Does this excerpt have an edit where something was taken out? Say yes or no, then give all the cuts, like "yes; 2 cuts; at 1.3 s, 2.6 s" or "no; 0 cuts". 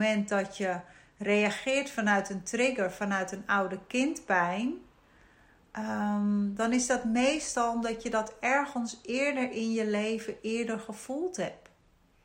no; 0 cuts